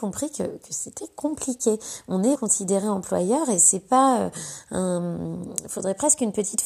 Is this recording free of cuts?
no; 1 cut; at 2.4 s

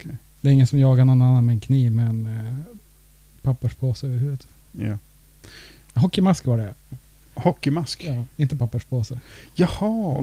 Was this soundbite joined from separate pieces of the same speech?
no; 0 cuts

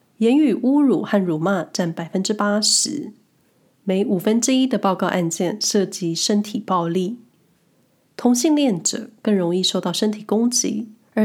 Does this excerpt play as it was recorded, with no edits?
yes; 0 cuts

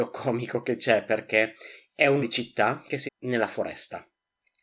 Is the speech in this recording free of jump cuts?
no; 2 cuts; at 2.2 s, 3.0 s

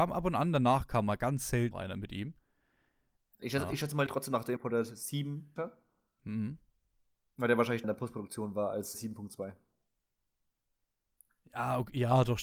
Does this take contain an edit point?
yes; 6 cuts; at 1.7 s, 4.1 s, 4.6 s, 5.6 s, 7.8 s, 8.9 s

